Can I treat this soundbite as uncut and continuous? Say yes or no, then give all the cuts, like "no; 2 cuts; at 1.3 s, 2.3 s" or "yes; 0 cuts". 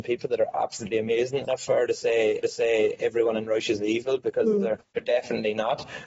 no; 3 cuts; at 1.4 s, 2.4 s, 4.9 s